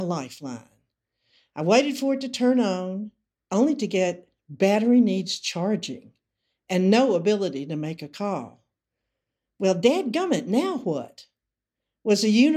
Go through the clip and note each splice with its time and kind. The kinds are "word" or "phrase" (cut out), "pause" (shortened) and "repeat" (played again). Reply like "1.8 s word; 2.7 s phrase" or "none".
none